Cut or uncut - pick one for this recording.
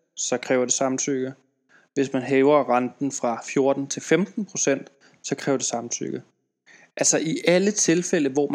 uncut